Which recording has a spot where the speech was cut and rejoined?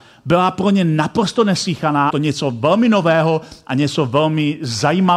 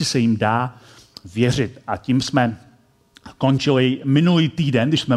first; 1 cut; at 2.1 s

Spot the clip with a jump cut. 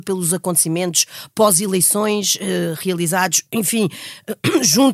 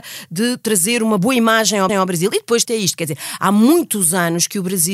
second; 2 cuts; at 1.9 s, 2.7 s

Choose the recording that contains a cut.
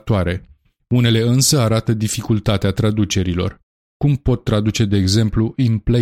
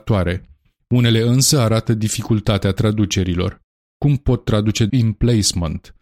second; 1 cut; at 4.9 s

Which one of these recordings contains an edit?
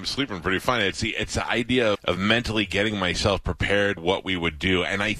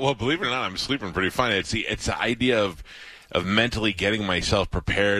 first; 2 cuts; at 1.9 s, 4.0 s

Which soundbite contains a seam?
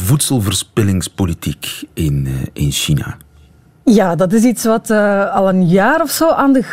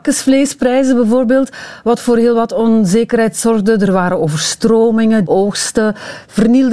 second; 1 cut; at 5.2 s

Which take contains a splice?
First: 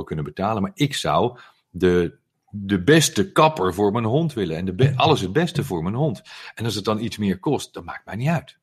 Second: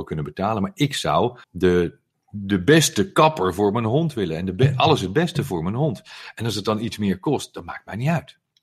second; 1 cut; at 1.4 s

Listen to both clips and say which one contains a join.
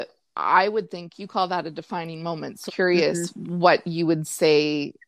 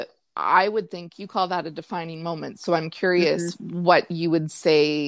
first; 1 cut; at 2.7 s

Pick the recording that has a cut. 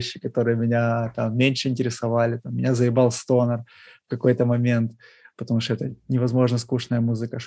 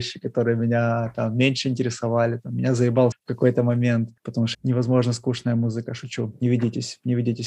second; 3 cuts; at 3.1 s, 4.2 s, 4.5 s

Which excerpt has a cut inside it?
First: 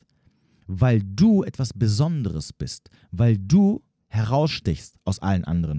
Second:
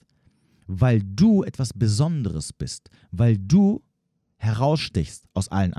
first; 1 cut; at 4.0 s

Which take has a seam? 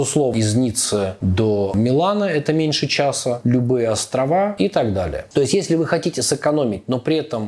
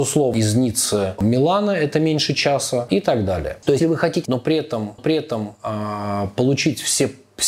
second; 5 cuts; at 1.2 s, 2.9 s, 3.8 s, 4.3 s, 5.0 s

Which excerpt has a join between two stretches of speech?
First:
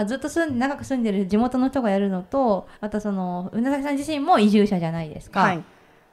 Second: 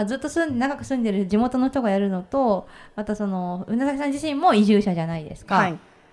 first; 1 cut; at 2.7 s

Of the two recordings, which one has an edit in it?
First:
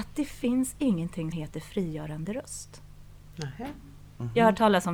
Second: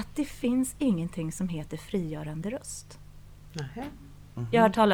first; 1 cut; at 1.3 s

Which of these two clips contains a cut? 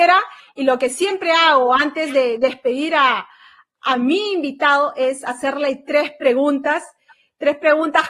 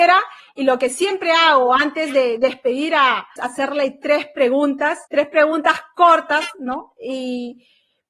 second; 2 cuts; at 3.4 s, 5.0 s

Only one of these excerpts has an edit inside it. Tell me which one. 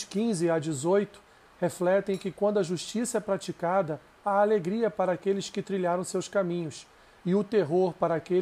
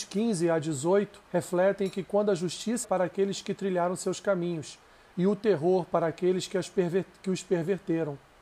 second; 2 cuts; at 1.2 s, 2.8 s

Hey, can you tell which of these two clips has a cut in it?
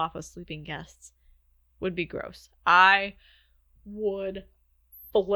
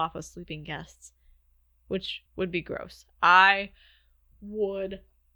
first; 1 cut; at 1.7 s

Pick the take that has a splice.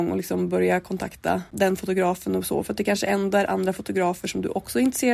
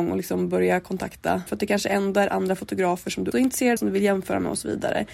second; 3 cuts; at 1.5 s, 3.3 s, 3.8 s

